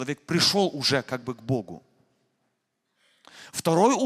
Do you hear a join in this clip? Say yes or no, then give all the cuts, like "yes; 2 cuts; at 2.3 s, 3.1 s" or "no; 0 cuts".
no; 0 cuts